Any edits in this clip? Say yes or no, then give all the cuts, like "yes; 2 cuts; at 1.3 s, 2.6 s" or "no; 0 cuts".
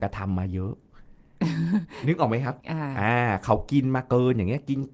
yes; 1 cut; at 2.6 s